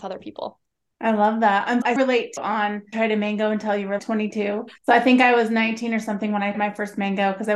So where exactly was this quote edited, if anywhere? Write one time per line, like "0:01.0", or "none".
0:02.0
0:02.4
0:02.9
0:04.0
0:04.8
0:06.5